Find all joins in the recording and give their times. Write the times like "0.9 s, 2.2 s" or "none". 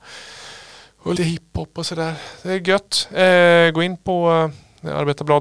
1.2 s